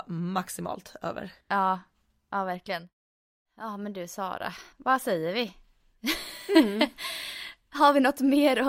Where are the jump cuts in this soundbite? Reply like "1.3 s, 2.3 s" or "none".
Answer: 1.4 s, 4.7 s